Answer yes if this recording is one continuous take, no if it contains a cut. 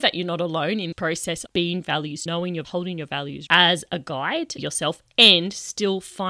no